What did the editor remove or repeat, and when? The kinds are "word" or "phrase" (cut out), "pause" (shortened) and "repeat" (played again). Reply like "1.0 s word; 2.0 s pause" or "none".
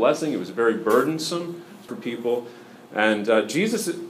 1.9 s phrase